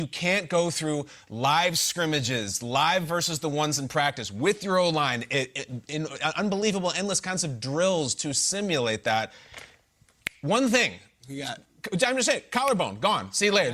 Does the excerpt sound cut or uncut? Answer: uncut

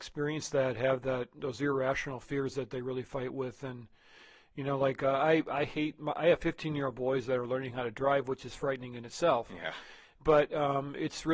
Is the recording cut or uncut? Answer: uncut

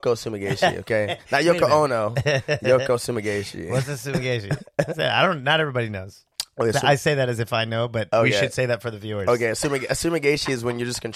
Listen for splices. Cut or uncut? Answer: uncut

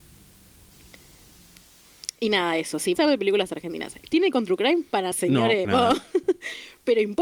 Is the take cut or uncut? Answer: cut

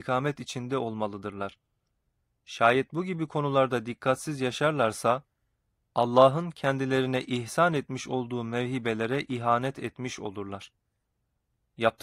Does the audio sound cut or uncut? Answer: uncut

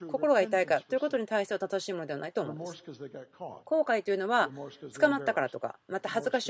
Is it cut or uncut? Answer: cut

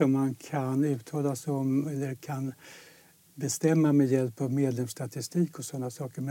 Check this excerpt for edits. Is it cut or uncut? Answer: uncut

